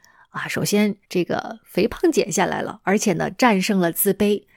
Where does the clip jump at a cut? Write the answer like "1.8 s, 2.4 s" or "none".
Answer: 1.0 s